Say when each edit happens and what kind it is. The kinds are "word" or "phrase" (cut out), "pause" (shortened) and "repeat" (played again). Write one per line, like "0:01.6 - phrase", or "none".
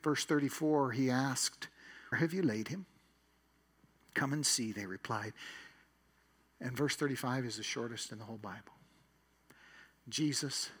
0:02.1 - word